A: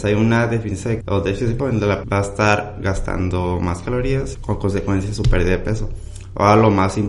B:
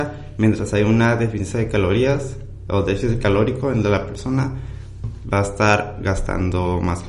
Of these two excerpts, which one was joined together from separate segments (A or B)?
A